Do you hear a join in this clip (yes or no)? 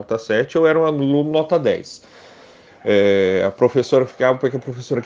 no